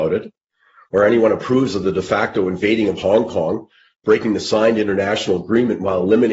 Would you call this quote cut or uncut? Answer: uncut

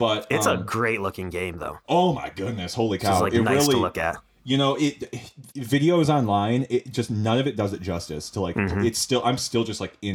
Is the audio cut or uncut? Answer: cut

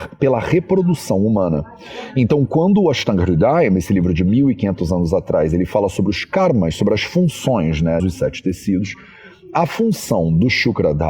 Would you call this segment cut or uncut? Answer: cut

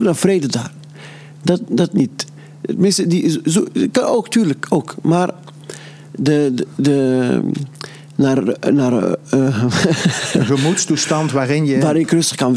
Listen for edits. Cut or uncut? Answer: uncut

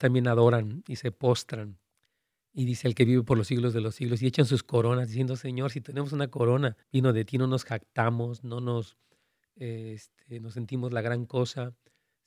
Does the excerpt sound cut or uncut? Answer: cut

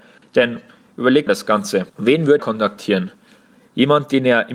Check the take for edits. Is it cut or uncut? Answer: cut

